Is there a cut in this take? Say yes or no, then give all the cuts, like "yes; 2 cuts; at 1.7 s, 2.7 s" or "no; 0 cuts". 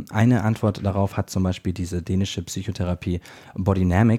no; 0 cuts